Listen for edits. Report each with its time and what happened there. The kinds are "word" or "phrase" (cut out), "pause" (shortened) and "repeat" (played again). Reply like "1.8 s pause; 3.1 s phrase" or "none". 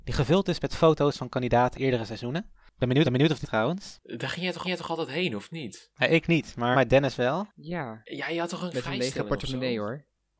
1.7 s word; 3.0 s repeat; 3.4 s phrase; 4.6 s repeat; 6.7 s word; 8.7 s word